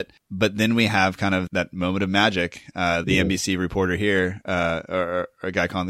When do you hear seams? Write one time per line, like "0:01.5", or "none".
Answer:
0:01.5
0:03.0

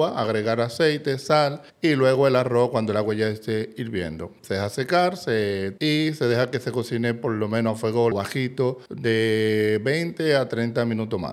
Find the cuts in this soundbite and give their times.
0:01.7
0:05.8
0:08.1
0:08.9

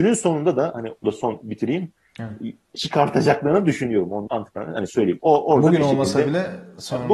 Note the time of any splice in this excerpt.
0:01.0
0:02.7
0:04.3

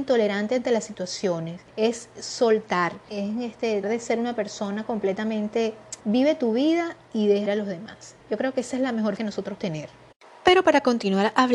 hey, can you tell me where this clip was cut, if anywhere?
0:01.7
0:03.1
0:03.8
0:06.0
0:07.0
0:07.5
0:08.2
0:09.2
0:09.6

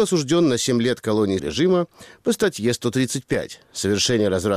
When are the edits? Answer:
0:01.4

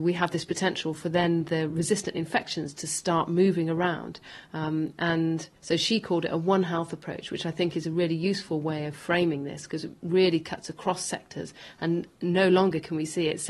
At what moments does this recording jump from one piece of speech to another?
none

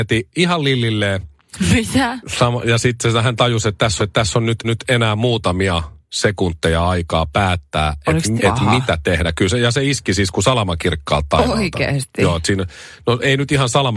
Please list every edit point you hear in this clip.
0:04.0
0:04.6
0:08.4

